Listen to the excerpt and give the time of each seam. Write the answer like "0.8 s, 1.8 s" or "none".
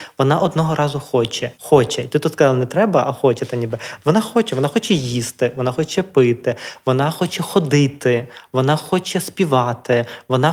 1.5 s